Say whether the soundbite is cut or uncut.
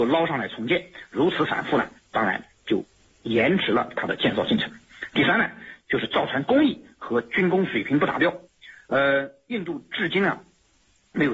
uncut